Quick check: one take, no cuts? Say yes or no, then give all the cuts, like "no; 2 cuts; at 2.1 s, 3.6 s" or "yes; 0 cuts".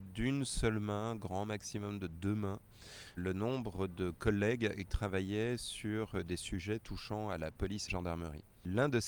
no; 3 cuts; at 3.2 s, 4.9 s, 7.9 s